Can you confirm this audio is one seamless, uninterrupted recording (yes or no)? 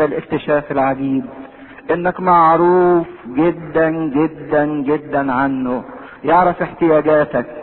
no